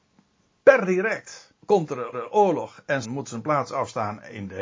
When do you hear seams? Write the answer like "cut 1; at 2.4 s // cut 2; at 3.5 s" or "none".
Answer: cut 1; at 1.6 s // cut 2; at 2.1 s // cut 3; at 3.0 s